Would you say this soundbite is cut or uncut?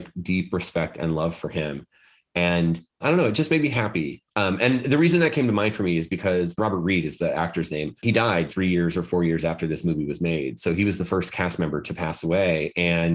cut